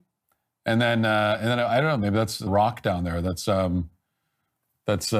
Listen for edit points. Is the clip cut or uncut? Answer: cut